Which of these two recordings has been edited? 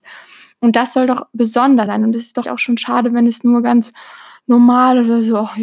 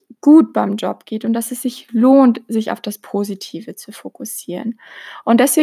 first; 2 cuts; at 1.9 s, 2.4 s

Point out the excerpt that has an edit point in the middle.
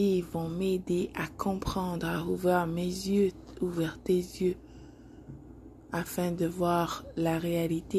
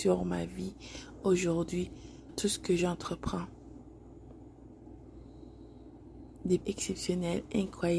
second; 2 cuts; at 2.3 s, 6.6 s

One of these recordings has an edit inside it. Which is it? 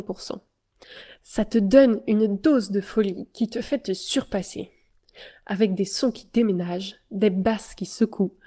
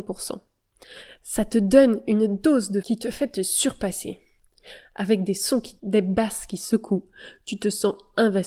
second; 2 cuts; at 2.8 s, 5.8 s

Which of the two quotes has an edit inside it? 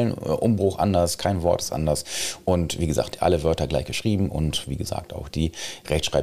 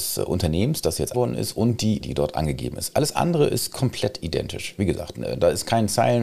second; 2 cuts; at 1.1 s, 2.0 s

